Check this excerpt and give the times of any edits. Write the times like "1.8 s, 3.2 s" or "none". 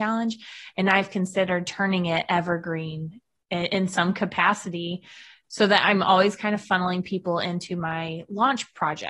none